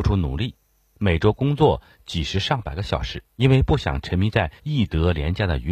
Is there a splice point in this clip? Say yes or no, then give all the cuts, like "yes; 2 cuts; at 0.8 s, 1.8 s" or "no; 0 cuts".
yes; 2 cuts; at 3.3 s, 4.6 s